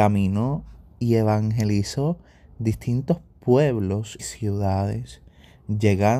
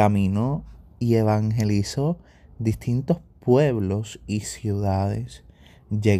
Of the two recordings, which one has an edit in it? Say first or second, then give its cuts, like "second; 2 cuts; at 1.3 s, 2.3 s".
first; 1 cut; at 4.2 s